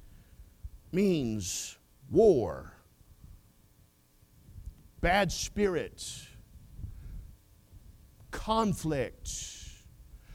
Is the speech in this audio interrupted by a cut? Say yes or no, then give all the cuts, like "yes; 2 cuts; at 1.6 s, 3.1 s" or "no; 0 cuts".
no; 0 cuts